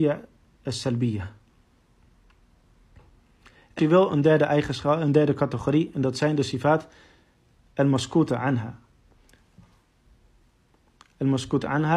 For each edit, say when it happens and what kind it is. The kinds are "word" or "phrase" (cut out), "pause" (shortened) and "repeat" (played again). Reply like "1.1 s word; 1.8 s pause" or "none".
3.8 s word